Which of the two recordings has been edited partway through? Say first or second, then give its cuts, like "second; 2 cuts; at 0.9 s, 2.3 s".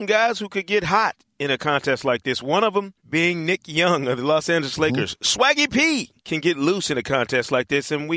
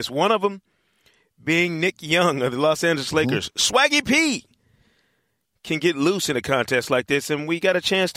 first; 2 cuts; at 3.0 s, 6.2 s